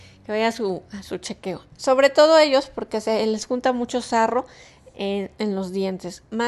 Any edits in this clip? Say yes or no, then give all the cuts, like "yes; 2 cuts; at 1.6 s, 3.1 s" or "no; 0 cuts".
no; 0 cuts